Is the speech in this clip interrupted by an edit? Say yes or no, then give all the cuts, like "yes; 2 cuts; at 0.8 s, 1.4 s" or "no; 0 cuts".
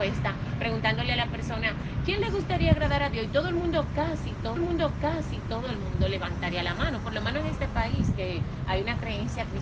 yes; 1 cut; at 4.6 s